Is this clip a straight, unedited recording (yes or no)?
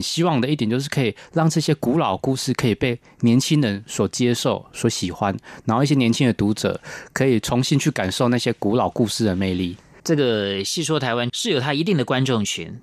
yes